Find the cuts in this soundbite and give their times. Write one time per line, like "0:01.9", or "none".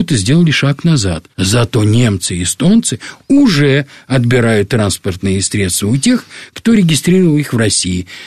0:01.3